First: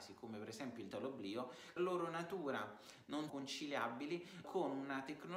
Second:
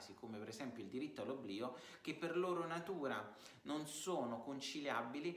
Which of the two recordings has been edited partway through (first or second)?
first